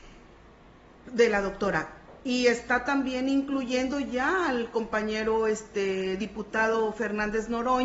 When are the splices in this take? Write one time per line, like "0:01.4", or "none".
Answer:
none